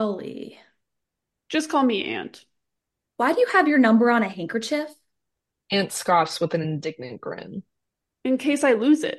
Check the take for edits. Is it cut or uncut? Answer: uncut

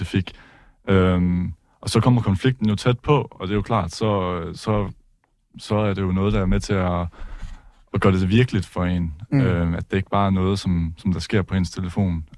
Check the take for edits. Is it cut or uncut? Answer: uncut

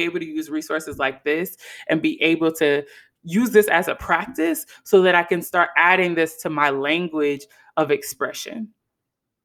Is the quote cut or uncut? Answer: uncut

